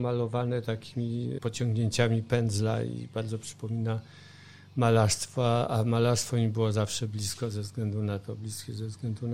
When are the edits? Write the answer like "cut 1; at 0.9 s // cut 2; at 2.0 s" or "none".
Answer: none